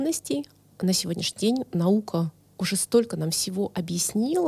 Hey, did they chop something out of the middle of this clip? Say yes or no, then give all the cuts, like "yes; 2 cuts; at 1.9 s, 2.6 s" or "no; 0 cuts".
no; 0 cuts